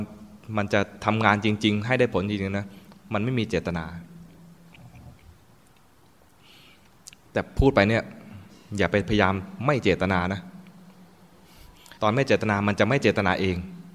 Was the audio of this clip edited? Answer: yes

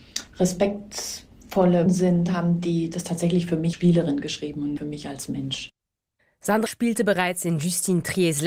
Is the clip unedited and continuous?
no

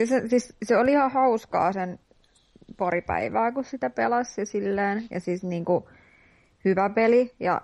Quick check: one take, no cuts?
yes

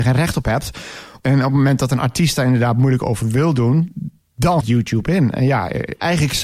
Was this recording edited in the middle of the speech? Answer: yes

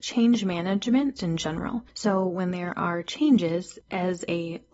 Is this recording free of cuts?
no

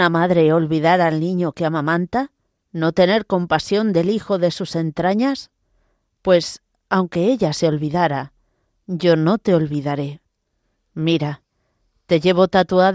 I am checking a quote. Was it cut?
no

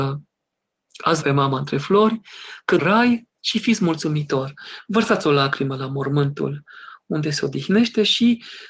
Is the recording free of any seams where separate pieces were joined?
no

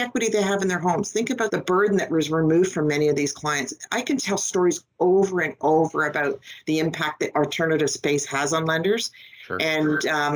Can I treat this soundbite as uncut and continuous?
yes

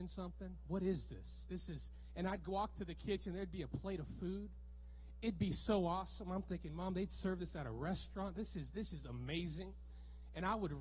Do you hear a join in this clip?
no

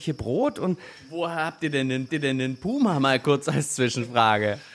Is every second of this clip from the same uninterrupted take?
no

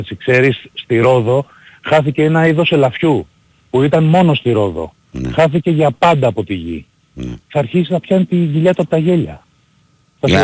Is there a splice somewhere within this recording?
yes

